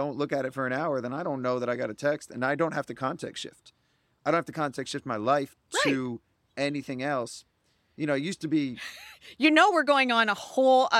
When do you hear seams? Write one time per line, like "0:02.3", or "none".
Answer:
none